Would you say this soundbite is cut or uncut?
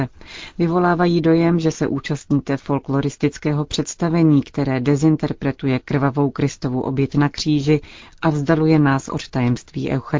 uncut